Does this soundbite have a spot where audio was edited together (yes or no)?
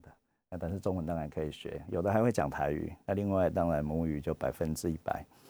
no